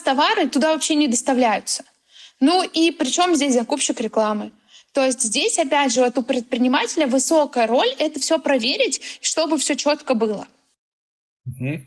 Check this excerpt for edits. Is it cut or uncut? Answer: uncut